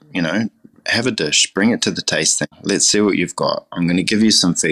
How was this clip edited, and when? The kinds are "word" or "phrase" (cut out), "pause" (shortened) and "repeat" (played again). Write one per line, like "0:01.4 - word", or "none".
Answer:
0:02.5 - pause